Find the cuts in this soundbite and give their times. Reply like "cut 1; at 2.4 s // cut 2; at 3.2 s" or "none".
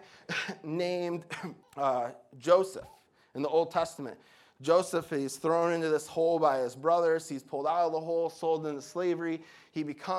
cut 1; at 1.6 s